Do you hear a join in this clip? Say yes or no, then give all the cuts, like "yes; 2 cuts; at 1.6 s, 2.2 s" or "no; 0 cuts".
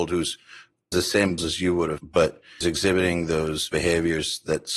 yes; 5 cuts; at 0.9 s, 1.4 s, 2.0 s, 2.6 s, 3.7 s